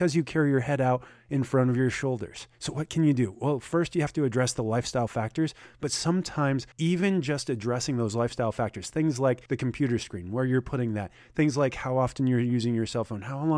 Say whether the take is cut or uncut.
cut